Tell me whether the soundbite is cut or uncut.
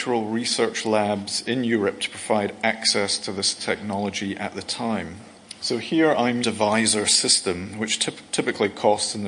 cut